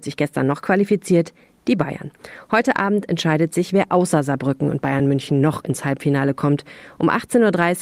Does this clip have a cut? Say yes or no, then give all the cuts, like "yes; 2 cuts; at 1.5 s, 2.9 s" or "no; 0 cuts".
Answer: no; 0 cuts